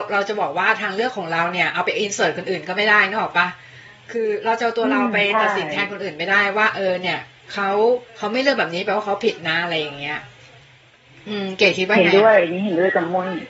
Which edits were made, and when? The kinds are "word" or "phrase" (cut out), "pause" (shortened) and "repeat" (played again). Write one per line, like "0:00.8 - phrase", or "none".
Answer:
0:08.1 - pause

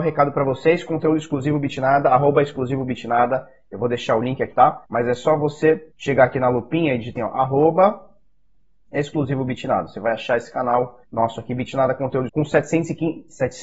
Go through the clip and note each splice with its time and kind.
0:04.5 - word
0:04.8 - pause
0:05.9 - pause
0:07.2 - word
0:11.0 - pause
0:12.3 - word

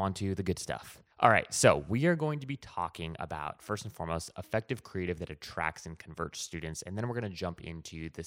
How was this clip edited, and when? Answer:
0:01.1 - pause

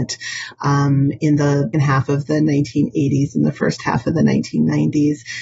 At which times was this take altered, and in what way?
0:01.7 - word

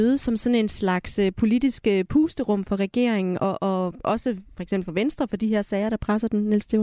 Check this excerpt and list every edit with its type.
none

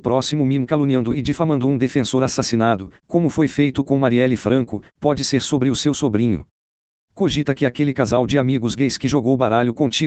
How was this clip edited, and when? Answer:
none

